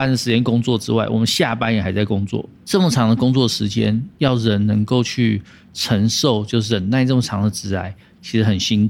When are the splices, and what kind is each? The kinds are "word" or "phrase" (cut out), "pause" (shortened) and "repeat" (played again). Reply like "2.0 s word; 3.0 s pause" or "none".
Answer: 2.5 s pause